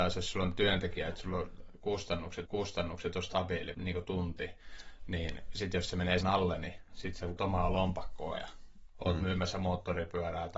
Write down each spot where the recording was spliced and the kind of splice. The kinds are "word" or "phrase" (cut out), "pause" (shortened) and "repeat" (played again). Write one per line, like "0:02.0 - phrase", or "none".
0:02.5 - repeat
0:03.7 - word
0:06.2 - word
0:07.4 - word